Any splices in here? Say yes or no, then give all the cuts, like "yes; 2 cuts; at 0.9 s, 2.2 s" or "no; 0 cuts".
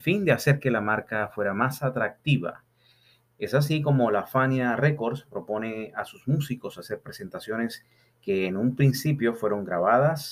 no; 0 cuts